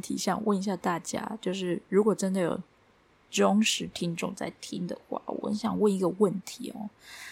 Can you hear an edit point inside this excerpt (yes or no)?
no